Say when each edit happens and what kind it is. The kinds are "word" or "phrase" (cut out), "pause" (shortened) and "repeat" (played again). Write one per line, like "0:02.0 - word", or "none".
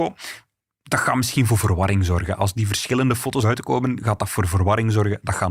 0:03.4 - word

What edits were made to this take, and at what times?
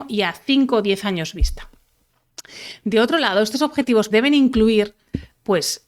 0:04.1 - word

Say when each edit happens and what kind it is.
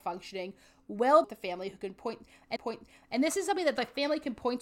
0:01.2 - phrase
0:02.6 - repeat

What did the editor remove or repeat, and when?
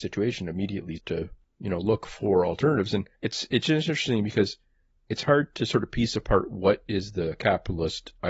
0:01.0 - word
0:03.1 - pause

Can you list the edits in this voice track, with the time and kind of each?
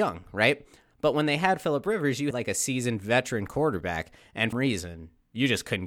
0:02.3 - word
0:04.5 - phrase

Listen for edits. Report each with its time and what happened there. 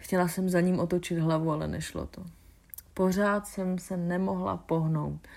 none

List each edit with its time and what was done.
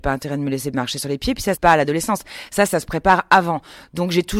0:01.6 - phrase

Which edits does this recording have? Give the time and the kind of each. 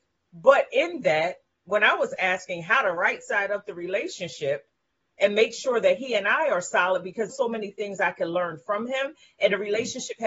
0:07.3 - phrase

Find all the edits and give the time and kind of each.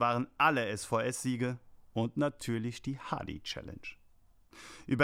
none

